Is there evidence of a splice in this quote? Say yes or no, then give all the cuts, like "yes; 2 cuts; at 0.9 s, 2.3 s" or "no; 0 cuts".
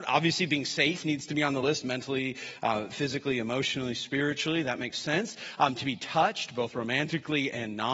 no; 0 cuts